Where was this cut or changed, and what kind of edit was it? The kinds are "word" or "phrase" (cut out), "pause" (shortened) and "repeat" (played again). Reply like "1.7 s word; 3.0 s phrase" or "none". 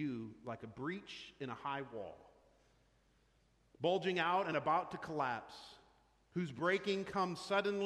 none